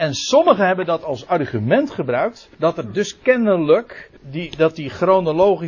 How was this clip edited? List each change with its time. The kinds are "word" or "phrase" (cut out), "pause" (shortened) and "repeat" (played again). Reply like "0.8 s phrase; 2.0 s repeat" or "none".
2.5 s pause; 4.2 s pause